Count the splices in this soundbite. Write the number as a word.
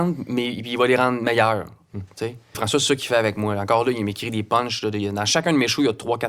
one